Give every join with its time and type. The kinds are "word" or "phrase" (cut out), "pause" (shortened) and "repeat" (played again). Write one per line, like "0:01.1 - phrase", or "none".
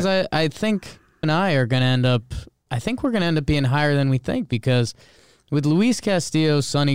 0:01.2 - word
0:02.7 - word